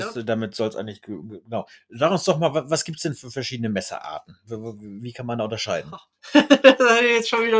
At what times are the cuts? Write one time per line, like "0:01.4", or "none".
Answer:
none